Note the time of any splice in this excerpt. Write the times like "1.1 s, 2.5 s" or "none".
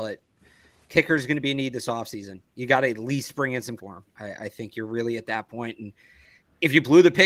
3.8 s